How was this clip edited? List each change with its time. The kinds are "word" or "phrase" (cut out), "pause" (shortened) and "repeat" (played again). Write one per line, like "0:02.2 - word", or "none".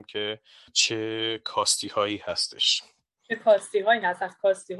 none